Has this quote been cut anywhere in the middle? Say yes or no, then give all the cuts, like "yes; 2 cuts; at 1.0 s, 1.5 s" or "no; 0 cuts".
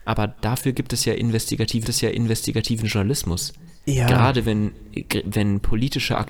yes; 1 cut; at 1.8 s